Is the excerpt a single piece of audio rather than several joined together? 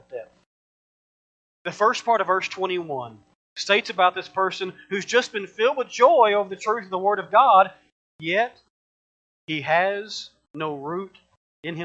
yes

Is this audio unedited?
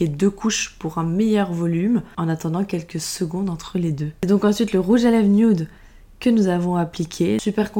yes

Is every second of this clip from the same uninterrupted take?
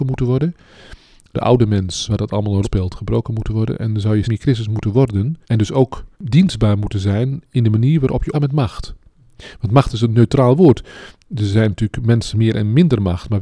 no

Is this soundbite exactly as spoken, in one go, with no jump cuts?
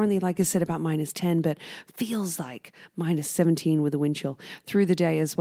yes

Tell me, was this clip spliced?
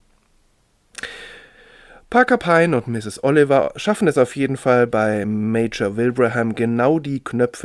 no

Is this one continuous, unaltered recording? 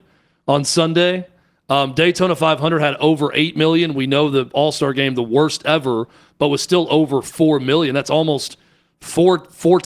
yes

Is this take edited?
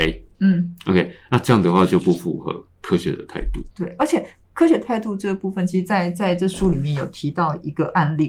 yes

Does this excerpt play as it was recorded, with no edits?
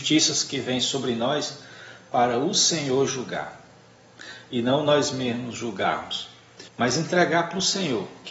no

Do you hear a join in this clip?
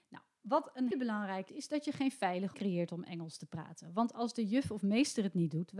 yes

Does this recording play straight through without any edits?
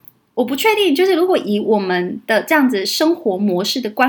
yes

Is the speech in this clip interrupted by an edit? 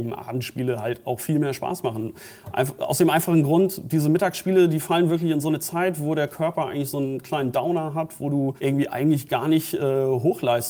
no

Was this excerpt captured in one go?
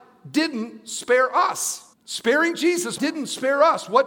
no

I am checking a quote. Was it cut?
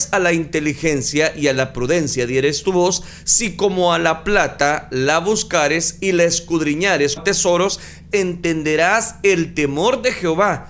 yes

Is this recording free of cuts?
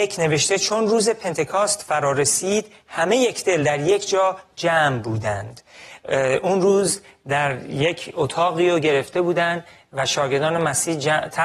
yes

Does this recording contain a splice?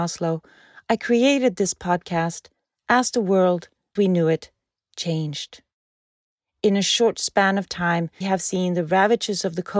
yes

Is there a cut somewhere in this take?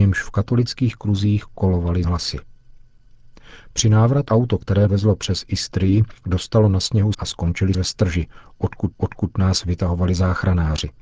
yes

